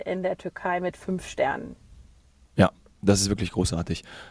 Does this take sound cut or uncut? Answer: uncut